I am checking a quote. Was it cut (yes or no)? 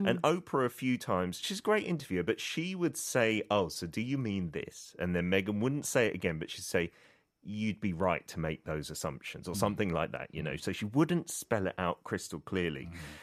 no